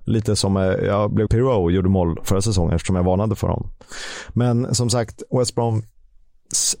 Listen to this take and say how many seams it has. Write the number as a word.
one